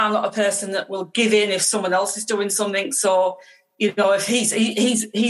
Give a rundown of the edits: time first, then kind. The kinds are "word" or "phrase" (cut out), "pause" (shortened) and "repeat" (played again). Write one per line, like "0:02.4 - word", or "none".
none